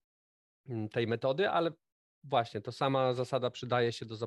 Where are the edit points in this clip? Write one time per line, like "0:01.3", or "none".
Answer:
none